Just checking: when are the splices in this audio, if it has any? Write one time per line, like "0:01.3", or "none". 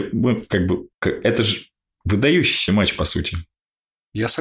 0:00.9